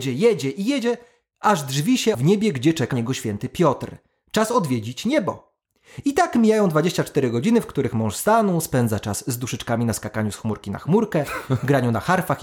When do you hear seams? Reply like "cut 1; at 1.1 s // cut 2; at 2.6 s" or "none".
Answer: cut 1; at 2.1 s // cut 2; at 2.9 s